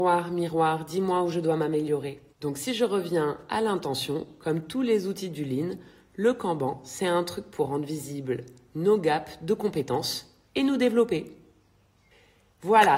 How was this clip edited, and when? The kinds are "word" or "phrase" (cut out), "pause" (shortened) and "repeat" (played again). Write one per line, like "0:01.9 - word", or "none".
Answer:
0:02.3 - pause
0:10.5 - pause

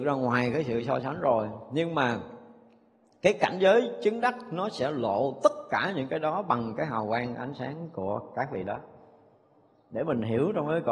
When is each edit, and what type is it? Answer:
none

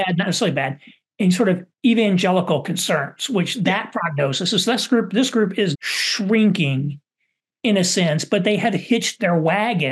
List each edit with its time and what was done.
0:01.7 - pause
0:05.7 - word

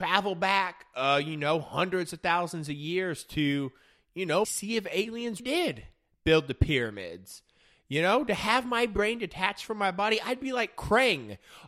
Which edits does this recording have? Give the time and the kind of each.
0:04.4 - word
0:05.4 - word

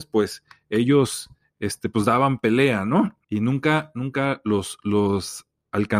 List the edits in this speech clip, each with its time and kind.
0:03.2 - pause

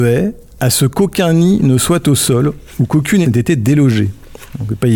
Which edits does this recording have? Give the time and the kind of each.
0:03.2 - word

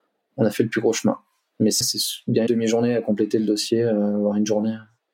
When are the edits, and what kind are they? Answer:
0:01.8 - word
0:02.5 - word

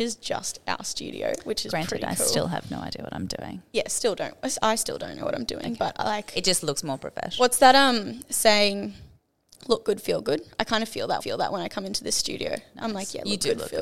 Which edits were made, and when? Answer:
0:11.2 - repeat

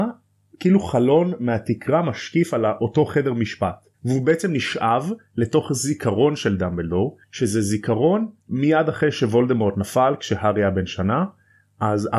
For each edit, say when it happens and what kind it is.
0:03.9 - pause
0:07.2 - pause
0:08.4 - pause

